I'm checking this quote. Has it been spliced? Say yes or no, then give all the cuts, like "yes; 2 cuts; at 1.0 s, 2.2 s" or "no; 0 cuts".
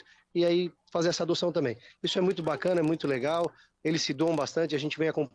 no; 0 cuts